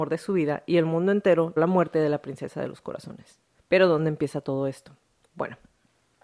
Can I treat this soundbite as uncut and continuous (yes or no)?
no